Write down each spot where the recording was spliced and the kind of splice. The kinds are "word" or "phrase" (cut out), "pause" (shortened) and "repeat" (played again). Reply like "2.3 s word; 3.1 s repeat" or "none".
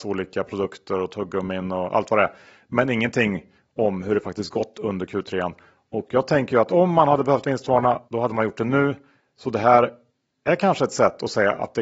8.1 s pause